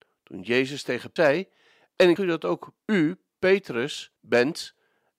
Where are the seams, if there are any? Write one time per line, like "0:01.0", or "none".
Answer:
0:01.2
0:02.2
0:02.8
0:04.2